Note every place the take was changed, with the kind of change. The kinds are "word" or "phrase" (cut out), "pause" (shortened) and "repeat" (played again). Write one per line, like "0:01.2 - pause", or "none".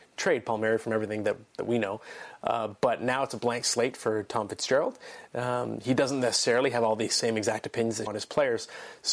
0:08.1 - word